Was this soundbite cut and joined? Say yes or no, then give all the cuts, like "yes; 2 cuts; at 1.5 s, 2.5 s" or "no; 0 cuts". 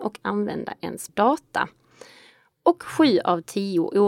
yes; 1 cut; at 1.1 s